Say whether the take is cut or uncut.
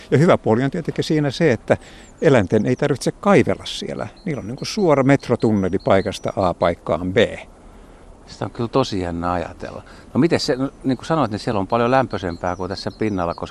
uncut